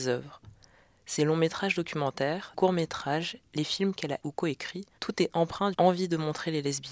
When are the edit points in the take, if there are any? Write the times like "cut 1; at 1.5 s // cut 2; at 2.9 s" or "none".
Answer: cut 1; at 2.5 s // cut 2; at 4.2 s // cut 3; at 5.0 s // cut 4; at 5.7 s

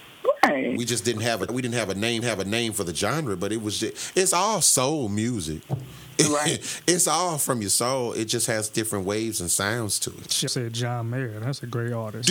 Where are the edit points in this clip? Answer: cut 1; at 1.5 s // cut 2; at 2.2 s // cut 3; at 10.5 s

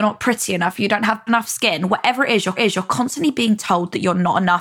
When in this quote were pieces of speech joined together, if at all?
cut 1; at 1.3 s // cut 2; at 2.6 s

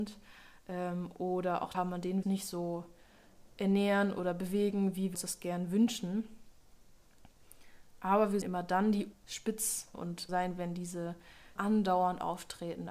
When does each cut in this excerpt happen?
cut 1; at 1.7 s // cut 2; at 2.2 s // cut 3; at 5.1 s // cut 4; at 8.4 s // cut 5; at 9.1 s // cut 6; at 9.9 s // cut 7; at 10.3 s // cut 8; at 11.6 s

